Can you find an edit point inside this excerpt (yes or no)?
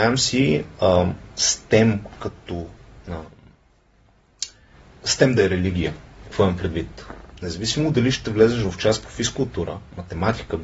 no